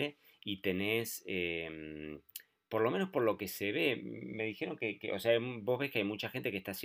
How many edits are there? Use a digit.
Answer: 0